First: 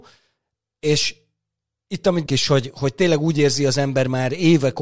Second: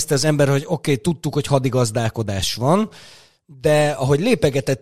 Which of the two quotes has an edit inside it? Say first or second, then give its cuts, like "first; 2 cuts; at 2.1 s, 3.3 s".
first; 1 cut; at 2.3 s